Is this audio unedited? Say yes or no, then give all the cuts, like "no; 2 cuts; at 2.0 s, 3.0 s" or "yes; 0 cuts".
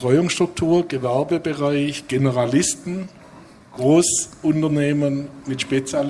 yes; 0 cuts